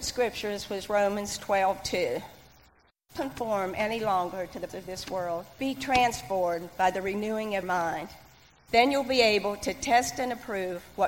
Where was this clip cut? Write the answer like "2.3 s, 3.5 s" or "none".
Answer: 3.2 s, 4.7 s, 5.6 s, 7.6 s